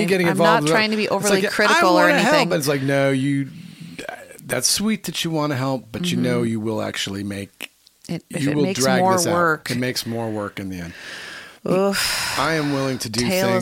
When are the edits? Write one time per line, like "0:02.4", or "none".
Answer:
0:11.6